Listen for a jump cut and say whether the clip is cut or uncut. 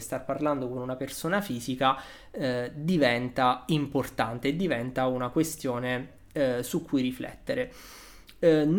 uncut